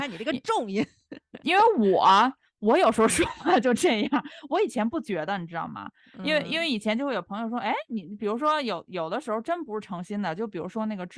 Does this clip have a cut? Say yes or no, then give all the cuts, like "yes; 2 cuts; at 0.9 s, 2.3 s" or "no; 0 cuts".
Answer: no; 0 cuts